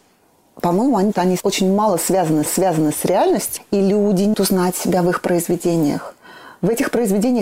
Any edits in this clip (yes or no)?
yes